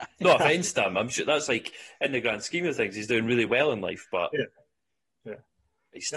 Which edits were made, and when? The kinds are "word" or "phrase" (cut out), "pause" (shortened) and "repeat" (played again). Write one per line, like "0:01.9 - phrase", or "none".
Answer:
none

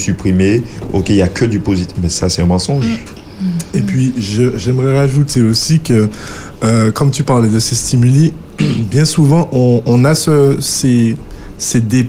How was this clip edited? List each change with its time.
none

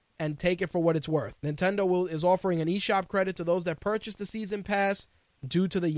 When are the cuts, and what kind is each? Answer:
0:01.4 - pause

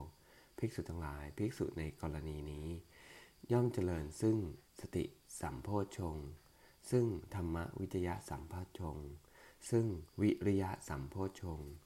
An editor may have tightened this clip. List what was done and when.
0:04.7 - pause
0:10.1 - pause

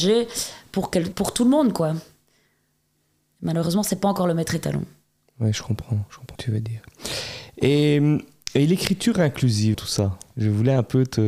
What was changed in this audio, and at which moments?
0:01.1 - word
0:06.3 - word
0:09.7 - word

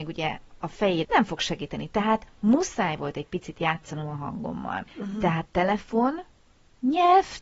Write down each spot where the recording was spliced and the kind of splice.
0:01.0 - phrase
0:02.3 - pause
0:04.9 - pause
0:05.4 - word

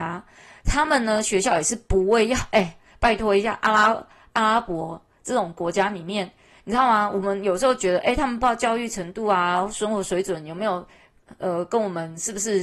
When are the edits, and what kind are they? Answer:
none

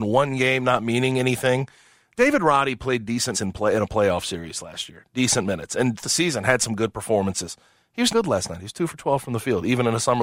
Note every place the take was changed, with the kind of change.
0:03.3 - word
0:06.0 - word
0:08.1 - word

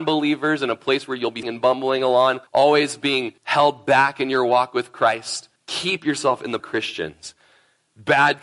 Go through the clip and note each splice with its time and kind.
0:01.4 - word
0:02.5 - pause
0:03.4 - pause
0:05.6 - pause
0:06.6 - phrase

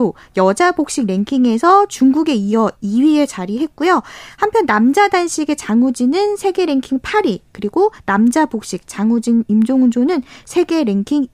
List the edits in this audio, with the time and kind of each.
none

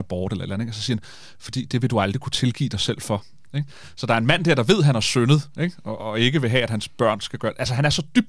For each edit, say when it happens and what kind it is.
0:06.0 - word

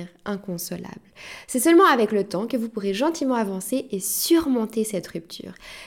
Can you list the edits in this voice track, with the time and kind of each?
none

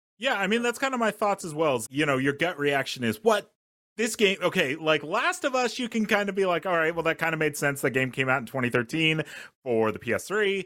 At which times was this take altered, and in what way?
0:01.8 - word

